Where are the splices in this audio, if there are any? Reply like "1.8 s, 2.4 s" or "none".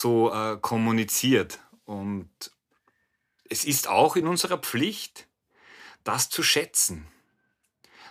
none